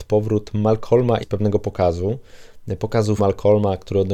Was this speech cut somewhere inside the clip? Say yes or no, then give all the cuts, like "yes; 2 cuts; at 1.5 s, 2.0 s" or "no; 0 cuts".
yes; 2 cuts; at 1.2 s, 3.2 s